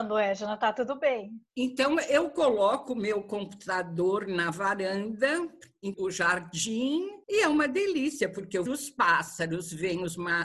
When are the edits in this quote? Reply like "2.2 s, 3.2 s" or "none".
1.5 s, 5.9 s, 7.2 s, 8.7 s